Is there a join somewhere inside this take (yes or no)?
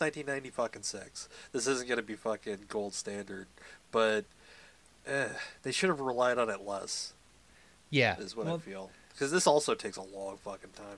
no